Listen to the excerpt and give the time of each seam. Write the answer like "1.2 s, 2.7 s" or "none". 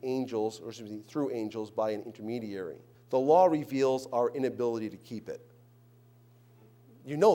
2.9 s